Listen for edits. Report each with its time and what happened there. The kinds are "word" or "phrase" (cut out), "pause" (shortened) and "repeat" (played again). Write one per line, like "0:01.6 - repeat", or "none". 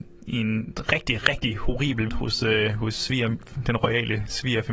0:02.1 - word